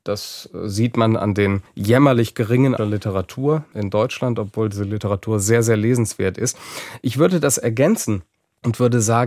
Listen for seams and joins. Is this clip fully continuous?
no; 2 cuts; at 1.7 s, 2.8 s

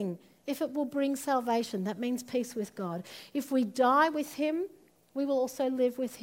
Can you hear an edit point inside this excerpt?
no; 0 cuts

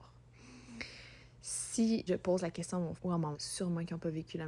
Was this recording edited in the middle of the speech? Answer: yes; 3 cuts; at 2.1 s, 3.0 s, 3.3 s

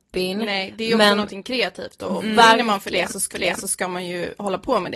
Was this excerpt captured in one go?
no; 1 cut; at 3.3 s

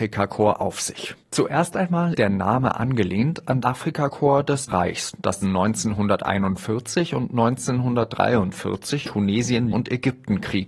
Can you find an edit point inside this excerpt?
yes; 6 cuts; at 2.1 s, 3.6 s, 4.7 s, 5.4 s, 9.0 s, 9.7 s

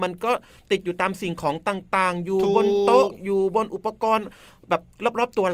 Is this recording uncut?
yes; 0 cuts

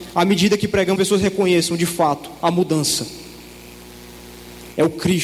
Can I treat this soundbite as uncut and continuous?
no; 1 cut; at 1.0 s

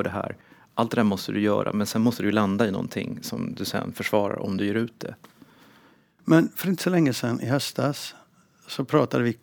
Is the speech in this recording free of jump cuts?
yes; 0 cuts

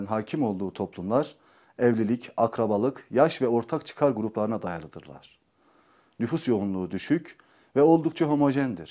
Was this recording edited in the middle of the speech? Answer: no; 0 cuts

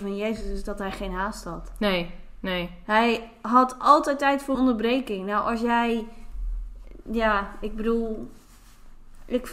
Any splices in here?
yes; 1 cut; at 4.5 s

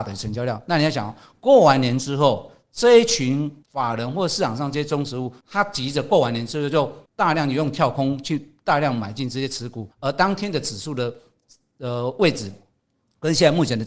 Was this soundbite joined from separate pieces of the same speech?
yes; 4 cuts; at 3.6 s, 5.4 s, 7.1 s, 9.9 s

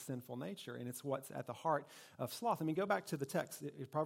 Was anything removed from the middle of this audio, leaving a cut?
no; 0 cuts

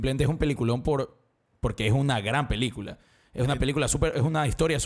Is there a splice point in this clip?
no; 0 cuts

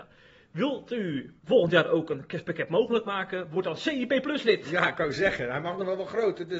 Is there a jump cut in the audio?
yes; 1 cut; at 1.4 s

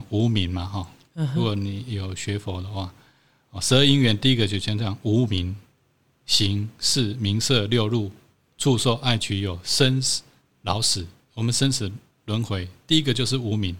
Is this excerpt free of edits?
yes; 0 cuts

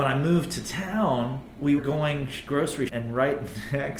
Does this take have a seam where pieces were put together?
yes; 2 cuts; at 1.8 s, 2.9 s

